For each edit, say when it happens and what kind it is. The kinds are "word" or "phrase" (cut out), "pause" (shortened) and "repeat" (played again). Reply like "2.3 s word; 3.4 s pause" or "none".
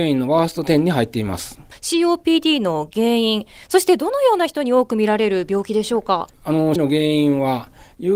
6.8 s word